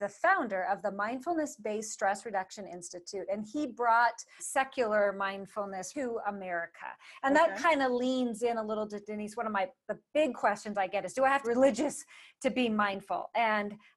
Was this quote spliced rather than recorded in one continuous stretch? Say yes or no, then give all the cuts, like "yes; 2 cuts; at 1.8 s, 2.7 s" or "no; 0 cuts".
yes; 3 cuts; at 4.4 s, 5.9 s, 11.4 s